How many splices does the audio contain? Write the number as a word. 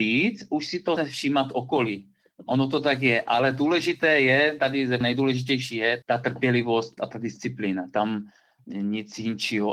four